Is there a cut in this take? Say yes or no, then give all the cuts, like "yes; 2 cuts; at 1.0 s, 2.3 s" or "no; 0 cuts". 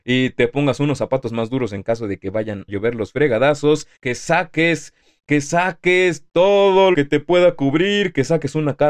yes; 3 cuts; at 2.7 s, 4.0 s, 6.9 s